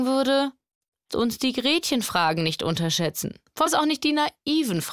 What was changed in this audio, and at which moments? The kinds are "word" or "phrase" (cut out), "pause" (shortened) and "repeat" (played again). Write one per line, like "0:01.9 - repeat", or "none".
0:01.1 - word
0:03.7 - word